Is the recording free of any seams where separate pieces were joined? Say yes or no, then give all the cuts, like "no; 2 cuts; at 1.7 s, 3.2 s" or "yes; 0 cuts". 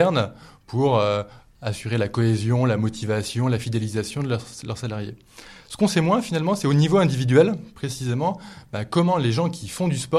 yes; 0 cuts